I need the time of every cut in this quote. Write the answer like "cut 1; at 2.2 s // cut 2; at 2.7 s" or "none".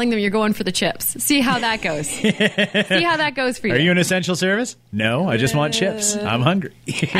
cut 1; at 4.8 s